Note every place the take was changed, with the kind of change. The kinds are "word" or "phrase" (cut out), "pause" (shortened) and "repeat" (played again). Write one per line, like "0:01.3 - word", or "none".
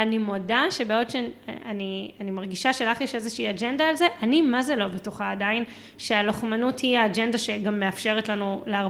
none